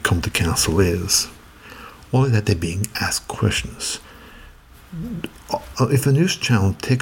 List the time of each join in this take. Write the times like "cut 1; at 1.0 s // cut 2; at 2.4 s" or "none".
none